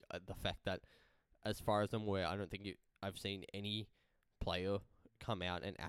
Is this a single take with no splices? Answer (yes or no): yes